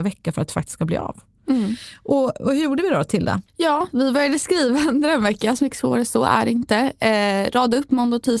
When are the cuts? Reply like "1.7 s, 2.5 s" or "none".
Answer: 3.5 s